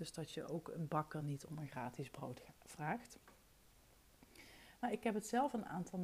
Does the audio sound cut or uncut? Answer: uncut